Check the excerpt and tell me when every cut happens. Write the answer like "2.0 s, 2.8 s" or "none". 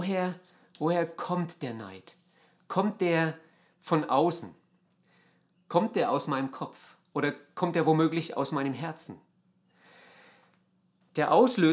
none